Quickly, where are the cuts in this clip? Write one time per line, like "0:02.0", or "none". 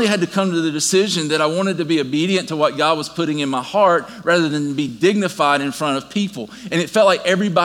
none